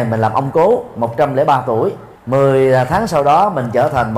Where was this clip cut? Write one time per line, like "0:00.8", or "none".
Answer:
0:02.2